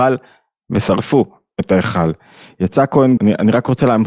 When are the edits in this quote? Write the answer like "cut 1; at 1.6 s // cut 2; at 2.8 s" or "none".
cut 1; at 3.2 s

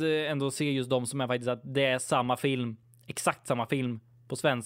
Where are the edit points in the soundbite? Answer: none

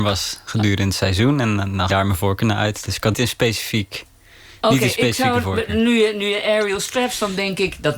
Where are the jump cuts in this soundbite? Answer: cut 1; at 1.9 s // cut 2; at 3.1 s

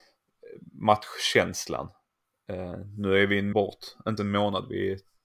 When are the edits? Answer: cut 1; at 3.5 s // cut 2; at 4.2 s

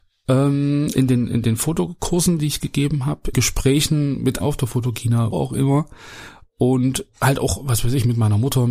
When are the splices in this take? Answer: cut 1; at 3.3 s // cut 2; at 4.4 s // cut 3; at 5.3 s

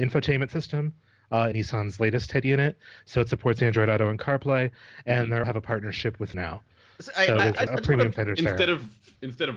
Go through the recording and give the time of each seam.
cut 1; at 1.5 s // cut 2; at 5.4 s // cut 3; at 6.3 s // cut 4; at 7.7 s

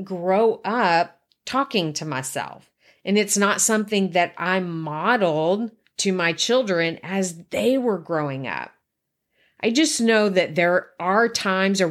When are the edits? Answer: none

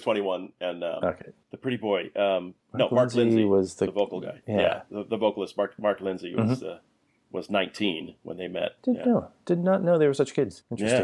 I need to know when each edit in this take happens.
none

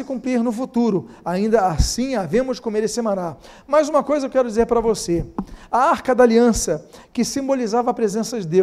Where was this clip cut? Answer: none

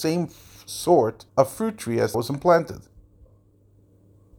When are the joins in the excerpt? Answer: cut 1; at 1.3 s // cut 2; at 2.1 s

